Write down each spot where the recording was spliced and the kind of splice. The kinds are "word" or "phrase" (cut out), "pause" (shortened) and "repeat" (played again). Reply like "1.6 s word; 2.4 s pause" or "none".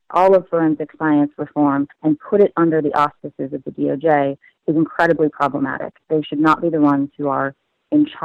1.9 s pause